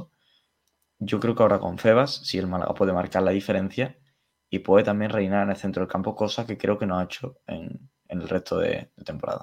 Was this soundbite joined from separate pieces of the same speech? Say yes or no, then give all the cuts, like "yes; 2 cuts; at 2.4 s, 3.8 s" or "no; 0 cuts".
no; 0 cuts